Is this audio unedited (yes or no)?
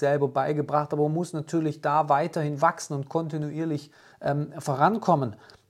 no